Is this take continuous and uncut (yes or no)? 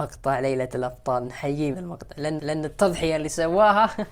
no